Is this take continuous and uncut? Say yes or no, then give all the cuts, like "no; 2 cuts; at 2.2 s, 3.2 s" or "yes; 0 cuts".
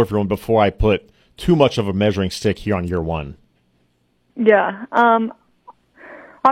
yes; 0 cuts